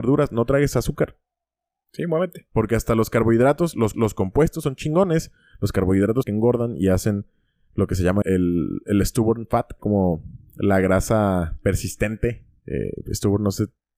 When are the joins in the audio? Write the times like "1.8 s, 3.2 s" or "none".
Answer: 3.9 s, 6.2 s, 8.2 s, 9.8 s